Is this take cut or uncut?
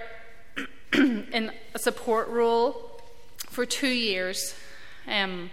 uncut